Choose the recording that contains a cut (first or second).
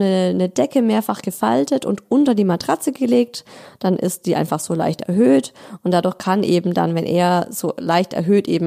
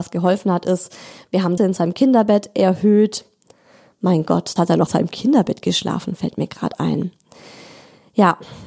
second